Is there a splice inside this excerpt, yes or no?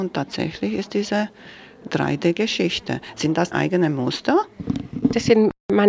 yes